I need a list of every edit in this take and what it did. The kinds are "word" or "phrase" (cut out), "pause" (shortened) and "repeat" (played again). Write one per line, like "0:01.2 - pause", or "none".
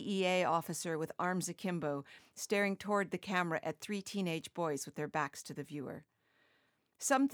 none